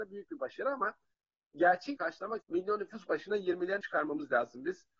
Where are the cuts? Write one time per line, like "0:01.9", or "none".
0:02.0
0:02.4
0:03.8